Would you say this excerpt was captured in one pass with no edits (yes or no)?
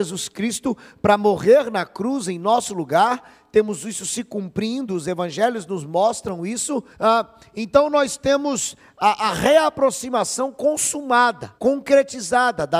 no